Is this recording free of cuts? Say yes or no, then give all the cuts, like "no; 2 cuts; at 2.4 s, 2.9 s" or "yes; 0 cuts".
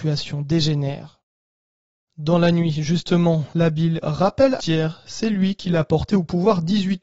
no; 2 cuts; at 4.0 s, 4.6 s